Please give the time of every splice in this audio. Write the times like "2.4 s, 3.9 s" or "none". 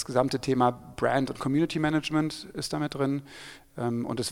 none

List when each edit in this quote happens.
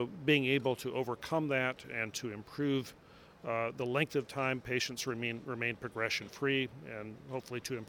none

